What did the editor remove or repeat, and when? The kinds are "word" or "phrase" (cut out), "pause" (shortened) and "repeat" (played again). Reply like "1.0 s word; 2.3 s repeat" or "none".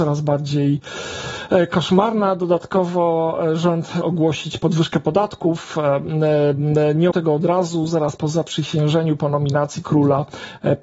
4.0 s word; 7.1 s word; 8.2 s word; 9.8 s word